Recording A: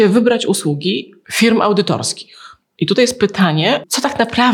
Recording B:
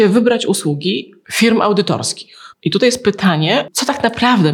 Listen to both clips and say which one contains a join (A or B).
B